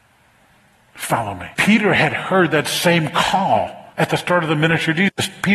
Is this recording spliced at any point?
yes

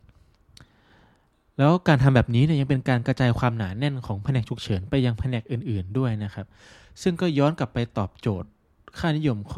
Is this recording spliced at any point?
no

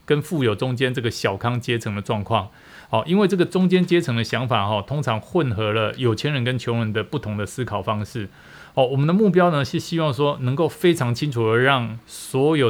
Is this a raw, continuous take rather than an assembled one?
yes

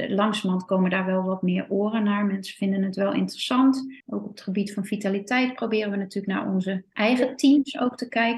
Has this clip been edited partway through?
yes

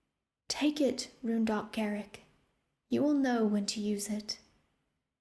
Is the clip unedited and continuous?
yes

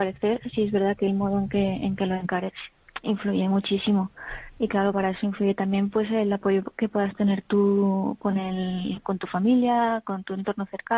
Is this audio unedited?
yes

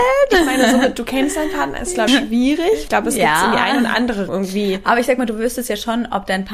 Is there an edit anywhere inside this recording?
yes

